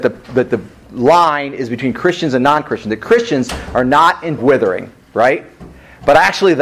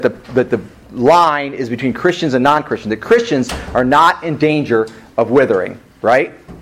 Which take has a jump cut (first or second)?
first